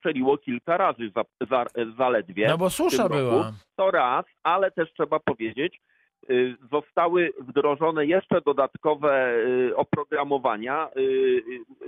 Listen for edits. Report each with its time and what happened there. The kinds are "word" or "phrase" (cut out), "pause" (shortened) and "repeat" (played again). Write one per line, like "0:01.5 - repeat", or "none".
0:03.7 - pause